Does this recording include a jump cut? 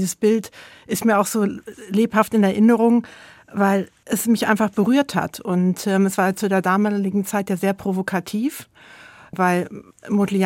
no; 0 cuts

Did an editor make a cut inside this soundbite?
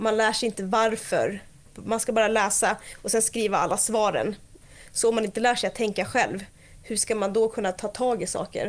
no; 0 cuts

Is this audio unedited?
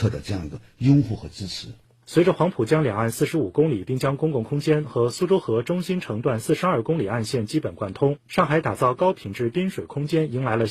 yes; 0 cuts

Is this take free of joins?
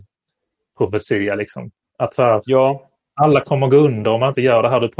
yes; 0 cuts

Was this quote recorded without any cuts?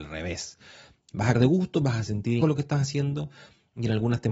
no; 2 cuts; at 1.3 s, 2.4 s

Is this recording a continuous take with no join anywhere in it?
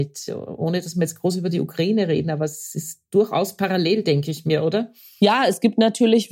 yes; 0 cuts

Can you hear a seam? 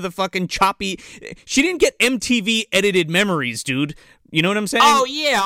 no; 0 cuts

